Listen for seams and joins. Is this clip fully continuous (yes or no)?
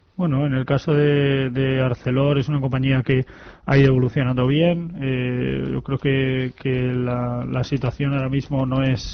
yes